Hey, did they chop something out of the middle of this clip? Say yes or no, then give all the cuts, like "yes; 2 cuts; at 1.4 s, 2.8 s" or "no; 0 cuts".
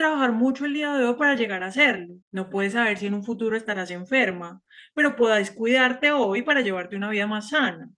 yes; 1 cut; at 2.2 s